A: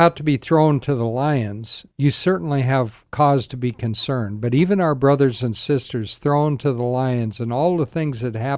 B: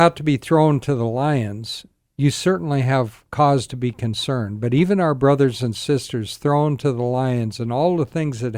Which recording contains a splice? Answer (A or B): A